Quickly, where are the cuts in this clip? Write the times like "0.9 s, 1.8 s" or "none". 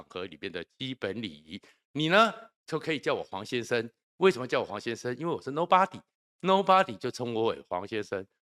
none